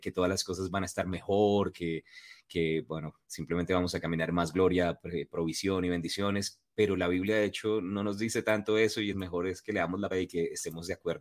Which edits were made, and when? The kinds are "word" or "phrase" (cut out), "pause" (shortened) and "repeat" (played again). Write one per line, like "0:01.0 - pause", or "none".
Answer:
0:09.1 - word
0:10.1 - word